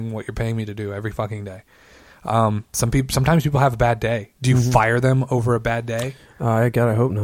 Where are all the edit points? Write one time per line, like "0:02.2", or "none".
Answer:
none